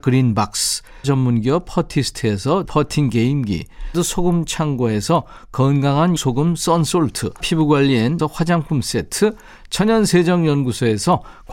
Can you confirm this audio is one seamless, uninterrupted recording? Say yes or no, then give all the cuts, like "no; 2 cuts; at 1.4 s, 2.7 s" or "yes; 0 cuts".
no; 6 cuts; at 1.0 s, 2.6 s, 3.9 s, 6.2 s, 7.4 s, 8.2 s